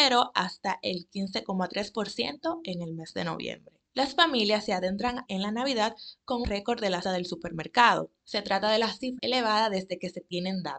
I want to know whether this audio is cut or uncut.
cut